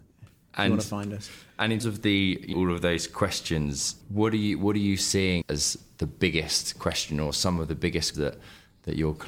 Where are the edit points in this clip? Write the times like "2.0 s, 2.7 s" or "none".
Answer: 1.8 s, 2.5 s, 4.0 s, 5.4 s, 8.1 s